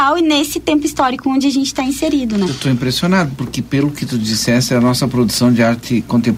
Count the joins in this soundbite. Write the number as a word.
zero